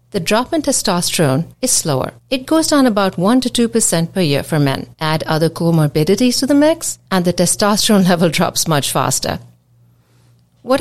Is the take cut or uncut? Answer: cut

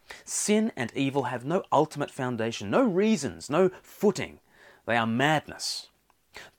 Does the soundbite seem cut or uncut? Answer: uncut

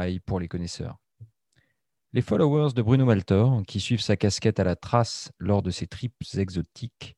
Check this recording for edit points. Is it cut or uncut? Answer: uncut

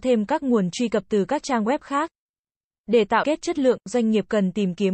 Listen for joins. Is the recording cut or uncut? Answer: cut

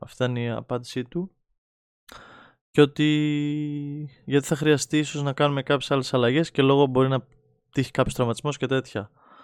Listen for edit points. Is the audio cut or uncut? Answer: uncut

